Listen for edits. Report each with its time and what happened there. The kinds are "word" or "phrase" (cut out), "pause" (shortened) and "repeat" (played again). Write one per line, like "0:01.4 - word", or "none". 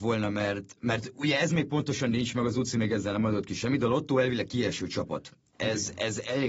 none